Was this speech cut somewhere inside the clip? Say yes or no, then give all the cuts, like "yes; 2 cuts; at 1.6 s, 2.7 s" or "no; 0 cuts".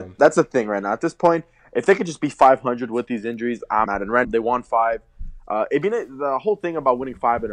yes; 2 cuts; at 3.9 s, 4.2 s